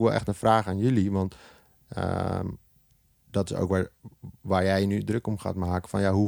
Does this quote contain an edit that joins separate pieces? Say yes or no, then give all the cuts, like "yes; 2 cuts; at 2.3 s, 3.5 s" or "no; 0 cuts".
no; 0 cuts